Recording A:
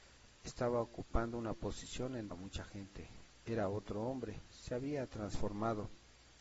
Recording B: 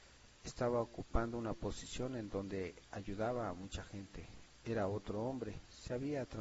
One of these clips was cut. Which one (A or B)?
A